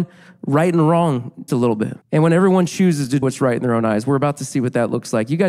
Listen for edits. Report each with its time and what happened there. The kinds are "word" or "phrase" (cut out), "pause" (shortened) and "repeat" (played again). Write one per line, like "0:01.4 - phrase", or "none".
0:01.5 - word
0:02.0 - pause
0:03.2 - word